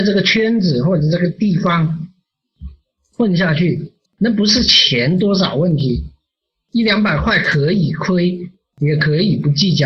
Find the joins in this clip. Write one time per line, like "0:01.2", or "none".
0:04.1